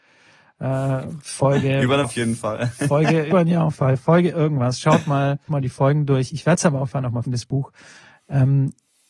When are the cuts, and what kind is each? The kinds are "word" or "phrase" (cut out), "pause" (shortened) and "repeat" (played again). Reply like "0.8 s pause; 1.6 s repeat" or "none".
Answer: 2.0 s word; 3.3 s word; 3.8 s word; 5.5 s word; 6.9 s word; 7.3 s word